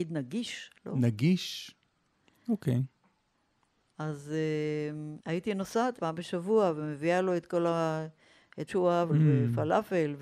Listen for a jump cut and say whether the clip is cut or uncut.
cut